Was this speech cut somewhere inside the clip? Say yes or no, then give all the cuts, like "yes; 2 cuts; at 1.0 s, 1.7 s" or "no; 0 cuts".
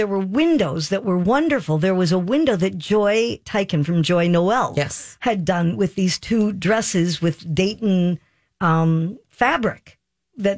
no; 0 cuts